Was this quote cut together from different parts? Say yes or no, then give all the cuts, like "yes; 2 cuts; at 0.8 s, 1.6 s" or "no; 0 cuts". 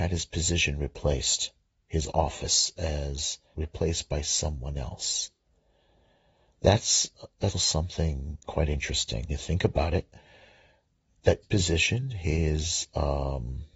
yes; 5 cuts; at 3.5 s, 7.5 s, 8.4 s, 9.3 s, 11.4 s